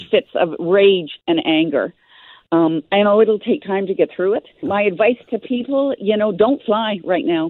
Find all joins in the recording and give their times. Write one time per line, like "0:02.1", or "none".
0:04.6